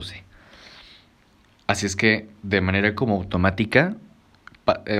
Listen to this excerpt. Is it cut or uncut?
uncut